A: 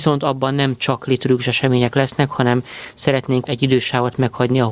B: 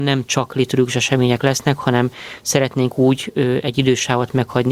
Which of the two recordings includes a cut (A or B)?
A